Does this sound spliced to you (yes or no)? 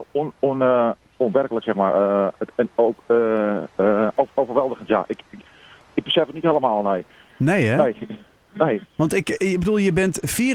no